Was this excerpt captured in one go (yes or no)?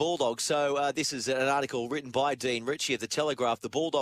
yes